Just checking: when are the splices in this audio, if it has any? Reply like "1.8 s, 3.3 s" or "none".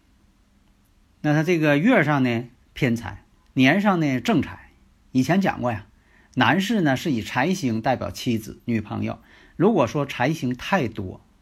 2.6 s, 3.3 s

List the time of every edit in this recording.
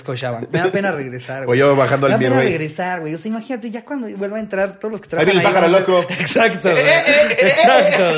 none

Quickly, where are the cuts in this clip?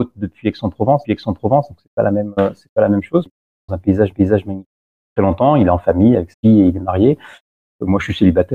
1.0 s, 3.3 s, 3.7 s, 4.1 s, 6.3 s

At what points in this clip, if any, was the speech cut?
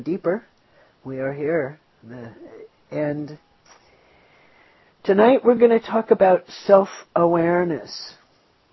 none

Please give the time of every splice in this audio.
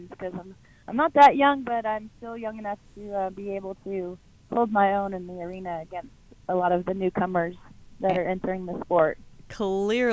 none

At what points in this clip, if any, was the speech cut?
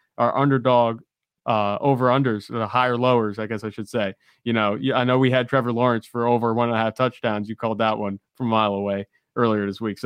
none

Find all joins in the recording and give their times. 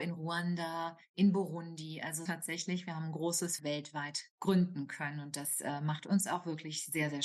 2.3 s, 3.6 s

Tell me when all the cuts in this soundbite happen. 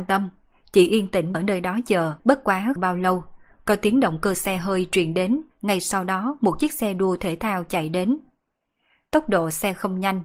1.3 s, 2.2 s, 2.8 s, 5.5 s

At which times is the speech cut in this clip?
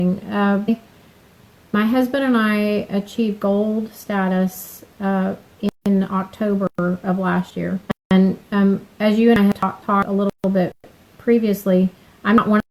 none

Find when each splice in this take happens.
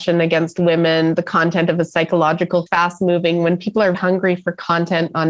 2.7 s, 3.9 s

